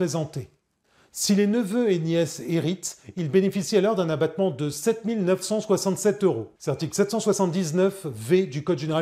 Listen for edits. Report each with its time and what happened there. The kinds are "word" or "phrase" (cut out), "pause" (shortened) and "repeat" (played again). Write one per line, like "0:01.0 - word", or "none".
0:06.6 - pause